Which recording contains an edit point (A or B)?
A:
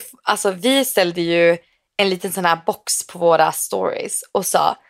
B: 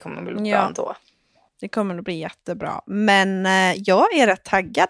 B